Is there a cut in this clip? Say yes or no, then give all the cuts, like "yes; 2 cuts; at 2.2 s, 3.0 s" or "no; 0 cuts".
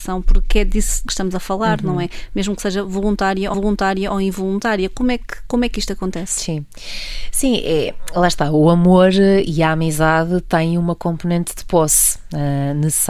yes; 2 cuts; at 1.1 s, 3.5 s